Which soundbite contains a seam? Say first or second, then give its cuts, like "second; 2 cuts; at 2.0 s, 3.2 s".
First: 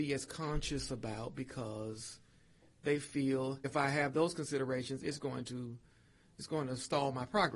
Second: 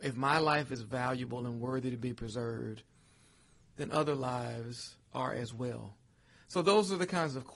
first; 1 cut; at 3.6 s